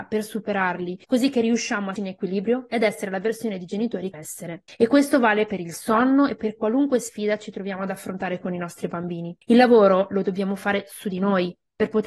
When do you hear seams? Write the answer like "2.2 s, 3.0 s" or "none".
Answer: 1.0 s, 2.0 s, 4.1 s